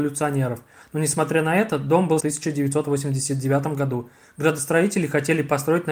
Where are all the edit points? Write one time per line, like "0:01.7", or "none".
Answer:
0:02.2